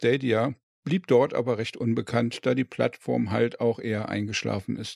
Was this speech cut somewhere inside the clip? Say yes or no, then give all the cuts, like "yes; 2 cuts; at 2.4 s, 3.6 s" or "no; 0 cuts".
no; 0 cuts